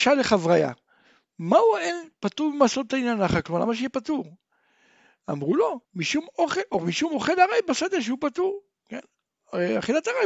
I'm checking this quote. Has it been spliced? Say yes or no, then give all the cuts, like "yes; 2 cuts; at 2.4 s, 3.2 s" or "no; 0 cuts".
yes; 1 cut; at 5.8 s